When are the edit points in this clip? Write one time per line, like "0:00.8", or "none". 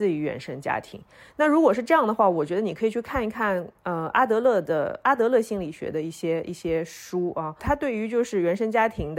none